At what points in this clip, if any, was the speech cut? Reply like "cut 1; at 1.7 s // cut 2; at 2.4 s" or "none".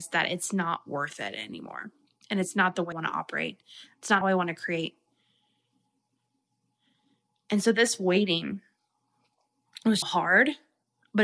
cut 1; at 2.9 s // cut 2; at 4.2 s // cut 3; at 10.0 s